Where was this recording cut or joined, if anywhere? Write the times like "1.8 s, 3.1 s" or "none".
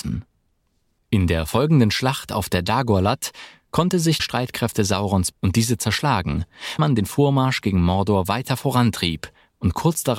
4.2 s, 5.3 s, 6.8 s